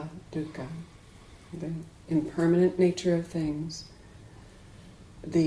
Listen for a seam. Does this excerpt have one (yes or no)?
no